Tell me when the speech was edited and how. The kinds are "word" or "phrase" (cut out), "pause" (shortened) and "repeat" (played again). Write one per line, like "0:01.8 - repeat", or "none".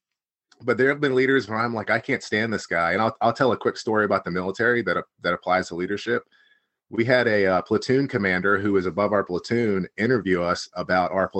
none